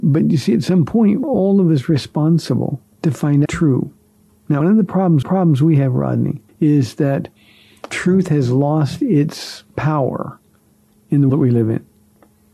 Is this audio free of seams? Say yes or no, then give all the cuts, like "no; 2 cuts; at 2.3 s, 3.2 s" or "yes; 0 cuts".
no; 9 cuts; at 1.2 s, 2.9 s, 3.4 s, 4.6 s, 5.2 s, 6.5 s, 7.9 s, 9.7 s, 11.3 s